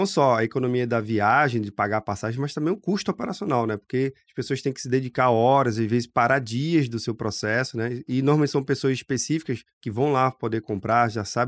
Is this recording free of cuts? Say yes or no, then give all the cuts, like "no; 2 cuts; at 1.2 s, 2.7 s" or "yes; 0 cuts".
yes; 0 cuts